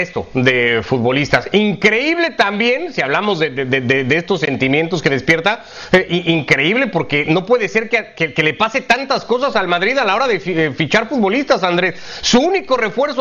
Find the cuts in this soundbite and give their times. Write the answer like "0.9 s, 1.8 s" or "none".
none